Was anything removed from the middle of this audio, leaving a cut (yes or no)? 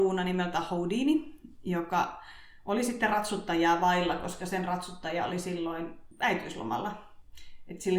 no